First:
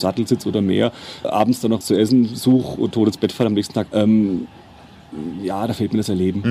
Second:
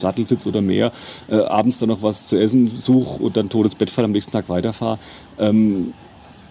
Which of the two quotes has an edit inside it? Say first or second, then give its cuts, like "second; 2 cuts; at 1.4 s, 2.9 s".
first; 4 cuts; at 1.2 s, 1.8 s, 2.9 s, 3.9 s